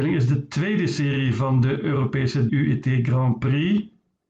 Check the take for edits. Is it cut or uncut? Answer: cut